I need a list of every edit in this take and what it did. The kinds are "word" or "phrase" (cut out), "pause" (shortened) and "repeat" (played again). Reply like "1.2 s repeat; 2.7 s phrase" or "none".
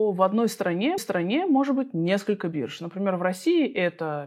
1.0 s repeat